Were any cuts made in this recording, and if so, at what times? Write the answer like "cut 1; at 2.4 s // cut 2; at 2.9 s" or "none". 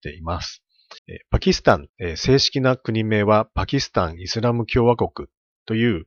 cut 1; at 1.0 s // cut 2; at 1.9 s